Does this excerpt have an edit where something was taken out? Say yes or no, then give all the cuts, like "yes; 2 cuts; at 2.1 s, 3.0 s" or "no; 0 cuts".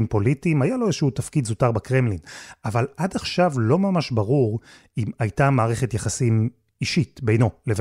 no; 0 cuts